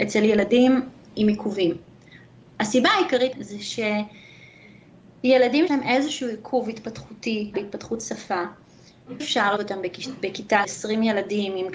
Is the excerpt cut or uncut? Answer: cut